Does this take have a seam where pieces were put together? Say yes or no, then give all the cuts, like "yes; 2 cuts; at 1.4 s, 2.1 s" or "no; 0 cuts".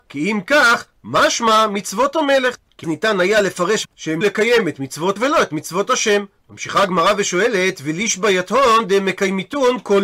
yes; 4 cuts; at 2.8 s, 3.8 s, 4.2 s, 5.2 s